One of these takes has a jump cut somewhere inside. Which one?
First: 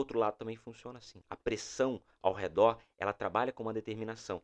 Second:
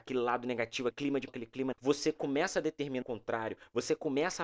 second; 4 cuts; at 0.9 s, 1.3 s, 1.7 s, 3.0 s

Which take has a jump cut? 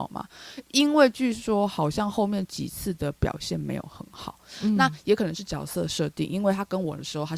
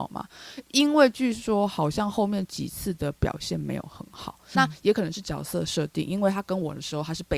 second; 1 cut; at 4.5 s

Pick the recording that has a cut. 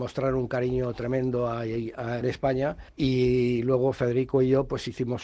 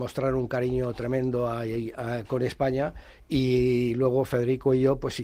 first; 2 cuts; at 2.2 s, 2.9 s

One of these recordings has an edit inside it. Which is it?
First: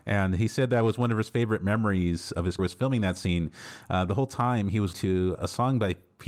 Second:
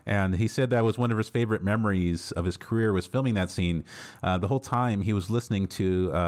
first; 3 cuts; at 2.6 s, 4.9 s, 5.3 s

